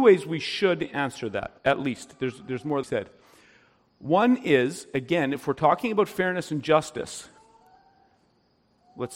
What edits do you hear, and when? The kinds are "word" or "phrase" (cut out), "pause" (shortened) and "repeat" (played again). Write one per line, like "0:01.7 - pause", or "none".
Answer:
0:01.6 - pause
0:02.8 - phrase

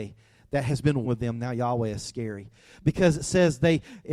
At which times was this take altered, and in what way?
0:01.0 - word

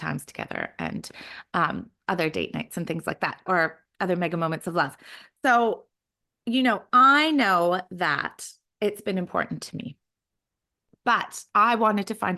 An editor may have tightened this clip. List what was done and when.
0:03.5 - word

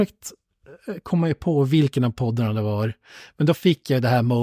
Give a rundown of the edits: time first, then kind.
none

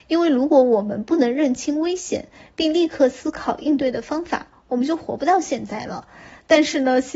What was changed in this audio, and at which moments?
none

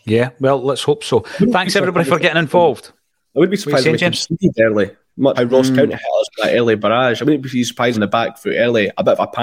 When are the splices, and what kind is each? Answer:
0:05.4 - word
0:07.9 - phrase

